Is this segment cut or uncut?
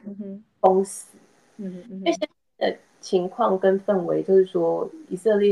uncut